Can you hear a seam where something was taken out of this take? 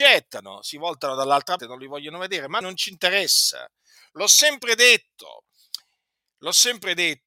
yes; 2 cuts; at 1.6 s, 2.6 s

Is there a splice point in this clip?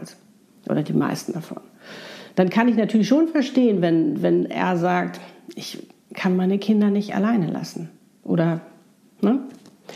no; 0 cuts

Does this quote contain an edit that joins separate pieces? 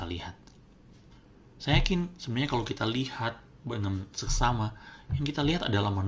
no; 0 cuts

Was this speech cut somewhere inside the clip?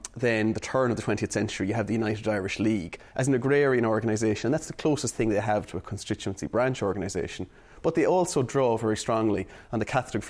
no; 0 cuts

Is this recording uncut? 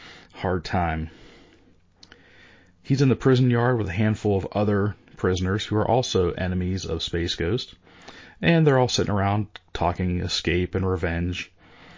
yes; 0 cuts

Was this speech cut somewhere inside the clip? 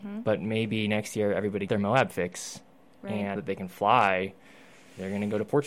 yes; 2 cuts; at 1.7 s, 3.4 s

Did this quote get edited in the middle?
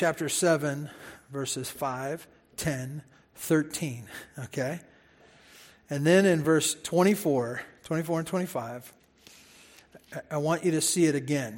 no; 0 cuts

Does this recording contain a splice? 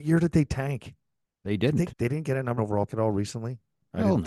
yes; 3 cuts; at 1.9 s, 2.6 s, 2.9 s

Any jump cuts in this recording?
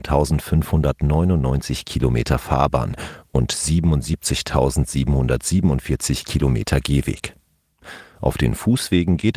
no; 0 cuts

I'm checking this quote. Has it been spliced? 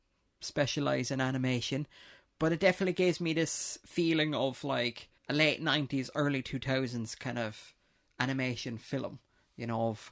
yes; 1 cut; at 5.2 s

